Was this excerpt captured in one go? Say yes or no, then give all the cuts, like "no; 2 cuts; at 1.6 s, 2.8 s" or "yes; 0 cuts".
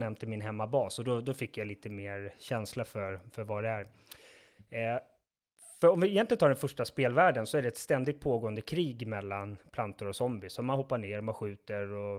yes; 0 cuts